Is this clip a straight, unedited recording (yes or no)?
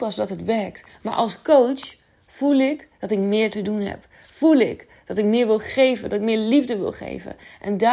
yes